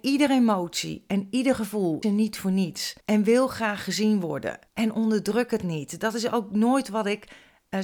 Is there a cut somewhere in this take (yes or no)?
yes